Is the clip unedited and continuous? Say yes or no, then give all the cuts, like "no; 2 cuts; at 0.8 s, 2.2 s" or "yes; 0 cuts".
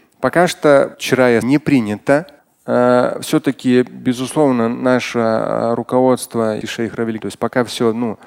no; 5 cuts; at 0.9 s, 1.4 s, 2.4 s, 6.6 s, 7.2 s